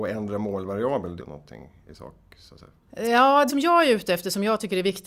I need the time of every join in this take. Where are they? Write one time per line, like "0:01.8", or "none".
0:01.2
0:03.5

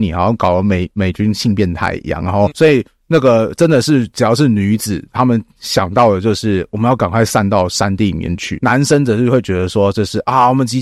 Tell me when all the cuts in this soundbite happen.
0:02.5

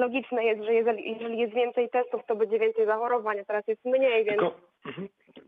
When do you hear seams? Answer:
none

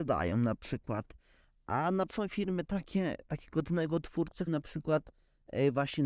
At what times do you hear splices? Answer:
0:02.1
0:04.5

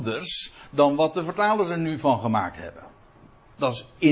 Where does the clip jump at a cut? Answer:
none

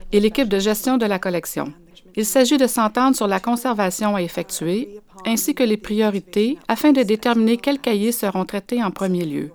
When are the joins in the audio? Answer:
0:01.9
0:06.6

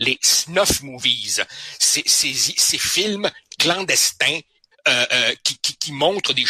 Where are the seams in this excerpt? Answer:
0:04.7

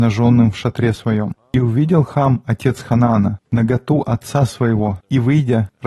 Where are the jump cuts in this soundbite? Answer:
none

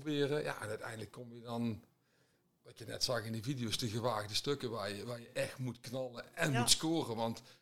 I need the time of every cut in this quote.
none

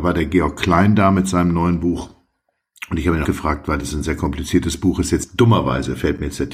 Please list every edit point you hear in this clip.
0:03.2

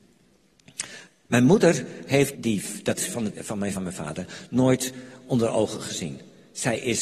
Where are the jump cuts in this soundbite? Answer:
0:02.3
0:03.0
0:03.3
0:03.7

